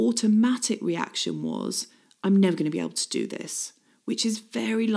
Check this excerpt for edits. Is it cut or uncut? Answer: uncut